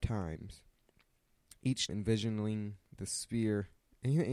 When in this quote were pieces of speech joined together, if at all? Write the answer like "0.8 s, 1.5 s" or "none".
1.9 s